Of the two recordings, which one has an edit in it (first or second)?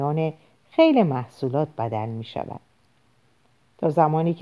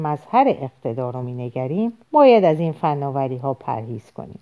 second